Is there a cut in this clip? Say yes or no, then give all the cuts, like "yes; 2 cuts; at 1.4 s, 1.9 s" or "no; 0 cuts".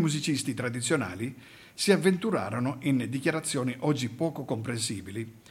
no; 0 cuts